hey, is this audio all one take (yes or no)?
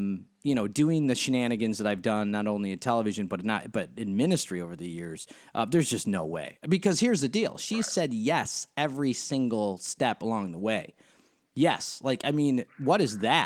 yes